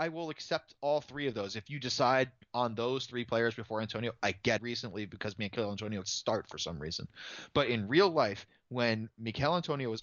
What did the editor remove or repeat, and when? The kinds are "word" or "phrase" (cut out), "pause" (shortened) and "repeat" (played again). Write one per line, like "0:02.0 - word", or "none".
0:04.6 - phrase
0:06.0 - word

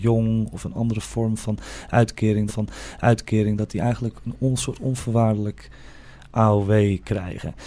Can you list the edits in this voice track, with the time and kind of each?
0:02.5 - repeat

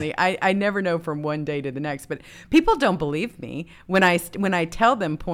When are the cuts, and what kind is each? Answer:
none

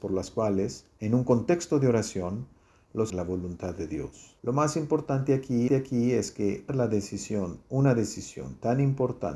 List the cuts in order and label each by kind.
0:03.1 - phrase
0:04.4 - pause
0:05.7 - repeat
0:06.7 - phrase

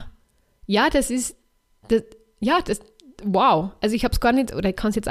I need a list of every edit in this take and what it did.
none

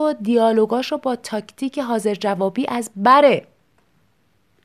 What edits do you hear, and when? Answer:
none

